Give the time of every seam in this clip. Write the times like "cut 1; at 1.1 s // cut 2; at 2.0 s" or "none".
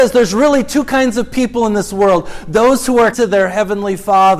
cut 1; at 3.1 s